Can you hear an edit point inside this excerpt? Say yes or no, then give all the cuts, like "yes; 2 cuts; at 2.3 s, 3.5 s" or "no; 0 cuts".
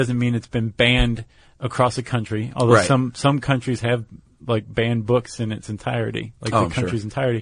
no; 0 cuts